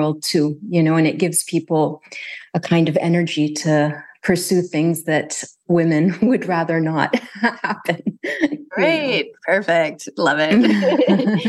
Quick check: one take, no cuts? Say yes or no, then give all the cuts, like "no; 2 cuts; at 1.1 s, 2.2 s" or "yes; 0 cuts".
yes; 0 cuts